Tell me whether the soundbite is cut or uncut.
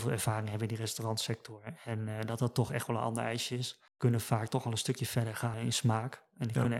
cut